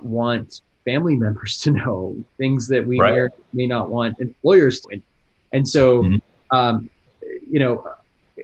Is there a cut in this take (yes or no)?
yes